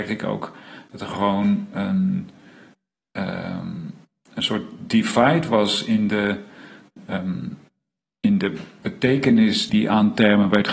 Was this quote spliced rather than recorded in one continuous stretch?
yes; 1 cut; at 9.7 s

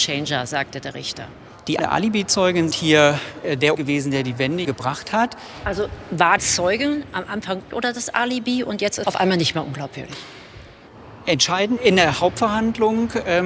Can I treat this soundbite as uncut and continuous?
no; 8 cuts; at 1.8 s, 2.7 s, 3.7 s, 4.6 s, 6.4 s, 7.7 s, 9.0 s, 11.8 s

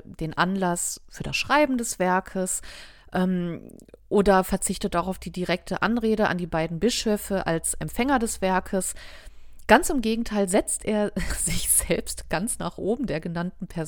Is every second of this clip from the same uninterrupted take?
yes; 0 cuts

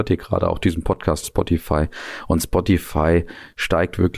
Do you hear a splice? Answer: yes; 1 cut; at 1.2 s

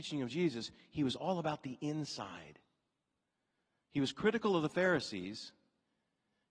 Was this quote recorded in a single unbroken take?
yes; 0 cuts

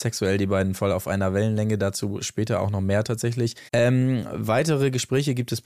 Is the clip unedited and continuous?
no; 1 cut; at 3.7 s

